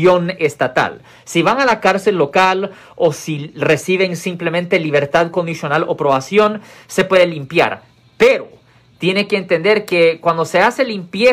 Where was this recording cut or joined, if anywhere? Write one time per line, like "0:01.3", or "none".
none